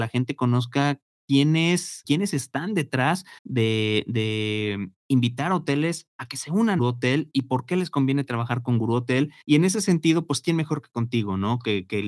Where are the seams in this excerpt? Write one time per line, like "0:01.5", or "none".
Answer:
0:02.0
0:03.4
0:06.8
0:09.4